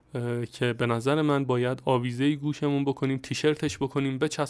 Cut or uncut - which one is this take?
uncut